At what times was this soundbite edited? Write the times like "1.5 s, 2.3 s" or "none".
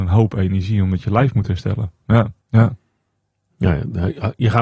2.4 s